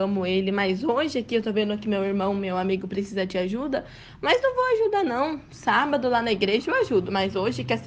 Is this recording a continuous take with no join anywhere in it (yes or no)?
yes